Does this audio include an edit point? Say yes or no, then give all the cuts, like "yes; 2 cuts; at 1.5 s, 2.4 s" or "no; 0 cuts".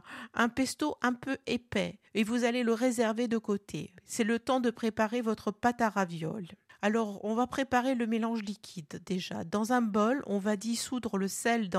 yes; 3 cuts; at 2.1 s, 4.0 s, 6.7 s